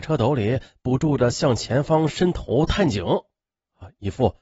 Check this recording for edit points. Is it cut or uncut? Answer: uncut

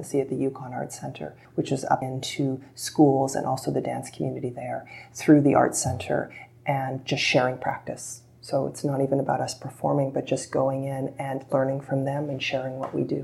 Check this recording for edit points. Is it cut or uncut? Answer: cut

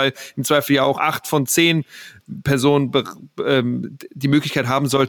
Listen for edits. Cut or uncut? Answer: cut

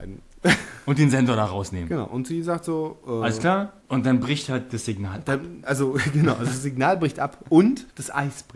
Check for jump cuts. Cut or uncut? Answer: uncut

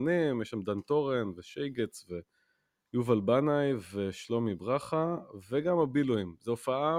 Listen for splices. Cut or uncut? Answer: uncut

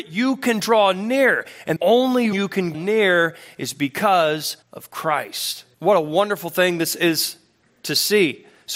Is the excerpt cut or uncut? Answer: cut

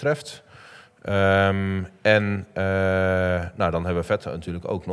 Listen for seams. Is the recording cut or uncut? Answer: uncut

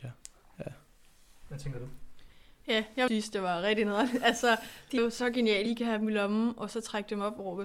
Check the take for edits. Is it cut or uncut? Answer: cut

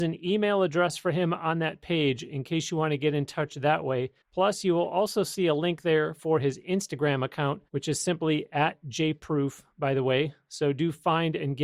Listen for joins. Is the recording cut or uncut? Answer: cut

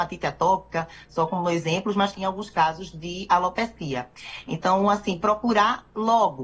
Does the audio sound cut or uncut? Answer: cut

